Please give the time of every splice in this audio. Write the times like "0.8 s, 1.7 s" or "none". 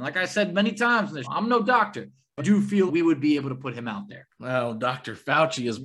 1.2 s, 2.4 s, 2.9 s